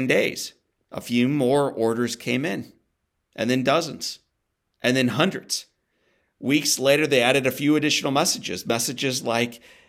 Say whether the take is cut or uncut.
uncut